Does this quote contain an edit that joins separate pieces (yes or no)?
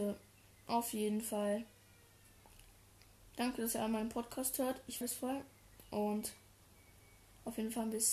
yes